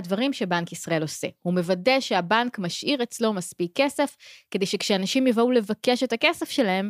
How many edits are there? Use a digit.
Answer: 0